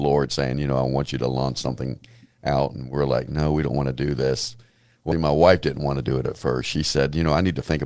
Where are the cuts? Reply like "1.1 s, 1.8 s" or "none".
5.1 s